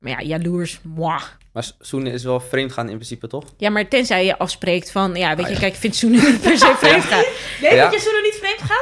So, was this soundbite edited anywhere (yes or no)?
no